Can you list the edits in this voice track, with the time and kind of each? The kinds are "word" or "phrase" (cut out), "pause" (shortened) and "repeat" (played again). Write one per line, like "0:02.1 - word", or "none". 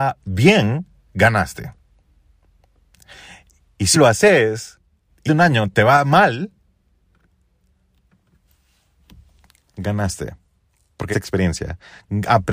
0:03.9 - word
0:05.3 - word
0:11.1 - word